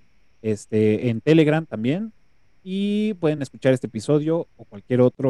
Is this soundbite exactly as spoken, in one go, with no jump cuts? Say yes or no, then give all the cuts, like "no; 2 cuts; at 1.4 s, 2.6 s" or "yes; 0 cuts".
yes; 0 cuts